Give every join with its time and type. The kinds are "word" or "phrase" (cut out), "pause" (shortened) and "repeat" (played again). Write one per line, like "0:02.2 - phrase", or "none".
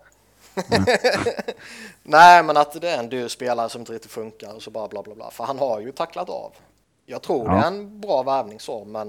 none